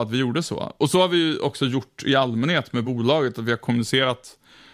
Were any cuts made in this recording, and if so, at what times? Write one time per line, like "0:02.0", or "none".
none